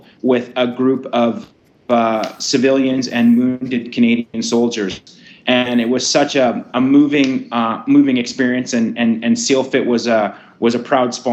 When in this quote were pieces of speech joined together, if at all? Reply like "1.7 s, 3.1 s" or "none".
none